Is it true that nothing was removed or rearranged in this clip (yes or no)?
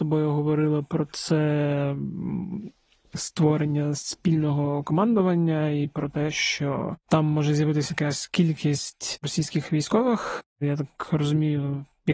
yes